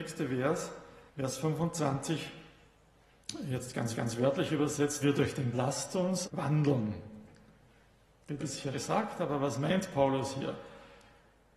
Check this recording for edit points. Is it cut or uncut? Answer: cut